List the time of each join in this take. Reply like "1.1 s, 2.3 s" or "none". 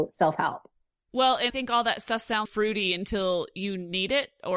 1.5 s, 2.5 s